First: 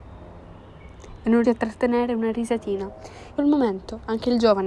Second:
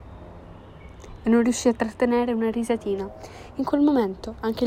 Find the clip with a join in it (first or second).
first